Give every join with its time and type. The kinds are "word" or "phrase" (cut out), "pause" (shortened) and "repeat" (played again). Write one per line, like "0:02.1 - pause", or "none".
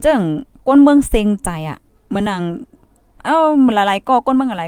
none